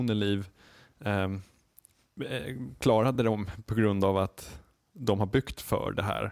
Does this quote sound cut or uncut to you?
uncut